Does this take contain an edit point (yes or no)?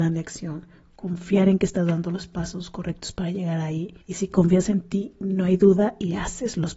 yes